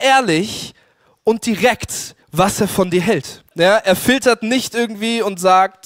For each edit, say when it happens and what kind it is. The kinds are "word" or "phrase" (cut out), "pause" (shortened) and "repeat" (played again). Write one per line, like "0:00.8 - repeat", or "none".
0:02.2 - pause
0:03.5 - pause